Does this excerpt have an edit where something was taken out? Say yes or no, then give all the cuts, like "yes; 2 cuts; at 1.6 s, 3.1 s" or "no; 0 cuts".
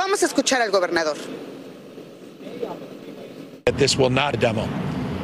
yes; 1 cut; at 4.3 s